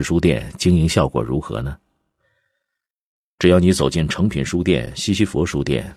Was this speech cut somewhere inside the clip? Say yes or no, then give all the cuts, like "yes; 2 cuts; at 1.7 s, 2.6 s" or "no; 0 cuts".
no; 0 cuts